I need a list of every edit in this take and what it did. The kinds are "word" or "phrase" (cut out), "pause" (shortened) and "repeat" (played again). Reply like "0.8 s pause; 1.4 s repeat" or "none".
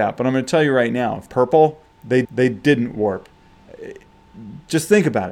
1.3 s phrase; 2.2 s repeat